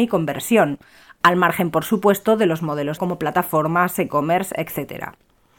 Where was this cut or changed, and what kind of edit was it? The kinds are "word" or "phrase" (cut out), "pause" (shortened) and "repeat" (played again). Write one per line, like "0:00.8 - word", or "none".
0:03.0 - phrase